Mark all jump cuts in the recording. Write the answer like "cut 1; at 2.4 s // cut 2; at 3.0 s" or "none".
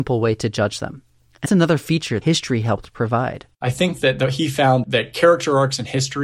cut 1; at 1.5 s // cut 2; at 2.2 s // cut 3; at 3.5 s // cut 4; at 4.8 s